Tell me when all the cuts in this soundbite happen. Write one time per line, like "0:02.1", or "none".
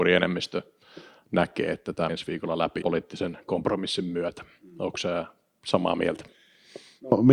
0:02.1
0:02.8